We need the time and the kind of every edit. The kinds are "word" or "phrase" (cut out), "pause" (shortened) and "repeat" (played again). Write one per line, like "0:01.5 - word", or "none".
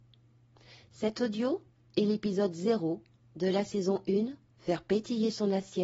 none